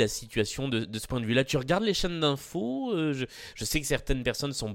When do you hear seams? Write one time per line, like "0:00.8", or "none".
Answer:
none